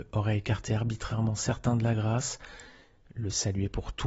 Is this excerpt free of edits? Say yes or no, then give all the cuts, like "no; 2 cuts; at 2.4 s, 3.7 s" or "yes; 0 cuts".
yes; 0 cuts